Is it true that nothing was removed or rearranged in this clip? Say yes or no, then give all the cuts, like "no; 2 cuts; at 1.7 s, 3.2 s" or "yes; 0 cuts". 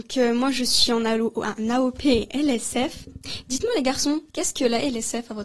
yes; 0 cuts